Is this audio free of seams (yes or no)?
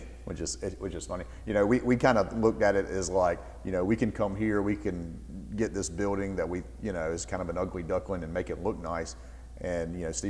yes